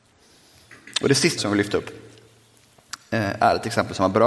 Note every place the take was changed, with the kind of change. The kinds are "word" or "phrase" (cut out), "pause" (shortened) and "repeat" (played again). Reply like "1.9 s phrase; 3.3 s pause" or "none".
1.4 s word